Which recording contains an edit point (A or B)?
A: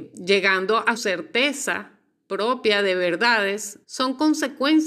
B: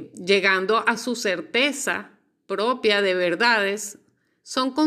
A